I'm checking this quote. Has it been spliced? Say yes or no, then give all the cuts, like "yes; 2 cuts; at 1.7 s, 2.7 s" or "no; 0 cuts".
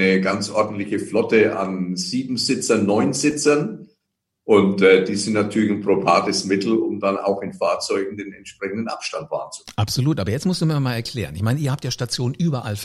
no; 0 cuts